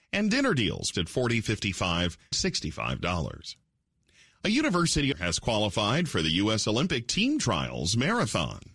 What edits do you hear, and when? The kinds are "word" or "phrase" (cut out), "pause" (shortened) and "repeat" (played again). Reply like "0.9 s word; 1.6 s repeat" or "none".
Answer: 0.9 s word; 2.3 s word; 5.1 s phrase